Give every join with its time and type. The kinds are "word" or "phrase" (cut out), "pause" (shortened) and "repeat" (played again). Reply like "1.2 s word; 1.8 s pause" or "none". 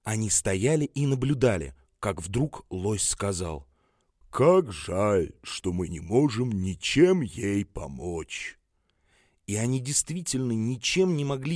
none